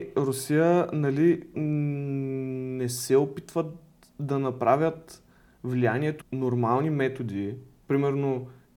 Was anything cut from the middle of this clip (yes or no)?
yes